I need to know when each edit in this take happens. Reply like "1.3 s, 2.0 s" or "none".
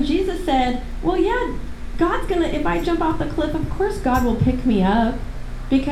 none